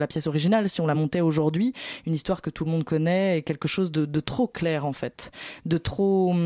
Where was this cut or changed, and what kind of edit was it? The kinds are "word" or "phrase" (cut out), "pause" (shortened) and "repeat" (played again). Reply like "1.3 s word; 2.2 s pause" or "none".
none